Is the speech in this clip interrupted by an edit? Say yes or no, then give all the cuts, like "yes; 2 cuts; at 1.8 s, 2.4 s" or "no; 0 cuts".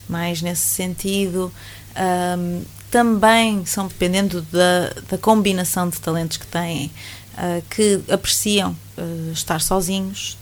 yes; 1 cut; at 3.9 s